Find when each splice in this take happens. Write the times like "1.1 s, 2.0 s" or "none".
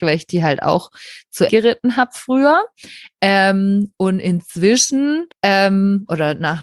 1.5 s, 5.3 s